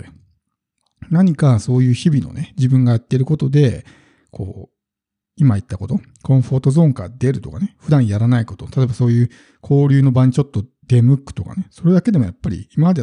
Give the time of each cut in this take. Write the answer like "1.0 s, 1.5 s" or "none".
none